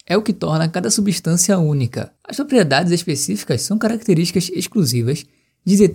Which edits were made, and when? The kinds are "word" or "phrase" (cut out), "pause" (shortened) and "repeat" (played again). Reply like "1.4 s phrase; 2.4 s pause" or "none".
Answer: 2.2 s pause